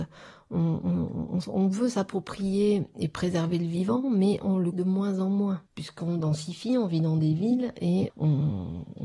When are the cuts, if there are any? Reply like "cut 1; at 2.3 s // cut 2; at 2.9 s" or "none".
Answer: cut 1; at 4.7 s // cut 2; at 5.7 s // cut 3; at 8.1 s